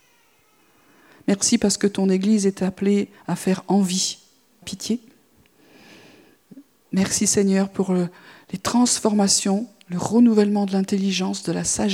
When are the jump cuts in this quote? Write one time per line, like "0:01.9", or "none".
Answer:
0:04.6